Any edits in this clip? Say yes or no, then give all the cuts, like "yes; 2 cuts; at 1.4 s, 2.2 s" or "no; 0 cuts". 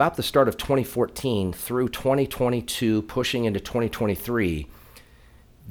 no; 0 cuts